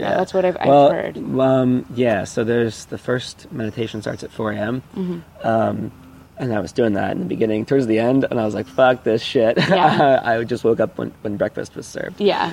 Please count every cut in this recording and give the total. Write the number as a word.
one